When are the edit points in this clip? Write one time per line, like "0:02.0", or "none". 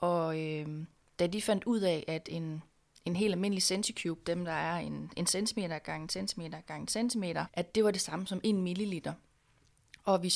0:07.5